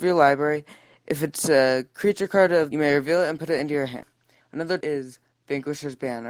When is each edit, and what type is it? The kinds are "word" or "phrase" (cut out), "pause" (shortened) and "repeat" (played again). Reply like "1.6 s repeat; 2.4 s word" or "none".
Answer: 2.7 s phrase; 4.8 s phrase